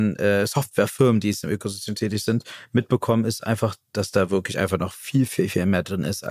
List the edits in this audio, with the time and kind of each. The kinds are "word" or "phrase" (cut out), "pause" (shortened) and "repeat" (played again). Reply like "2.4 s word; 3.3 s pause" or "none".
none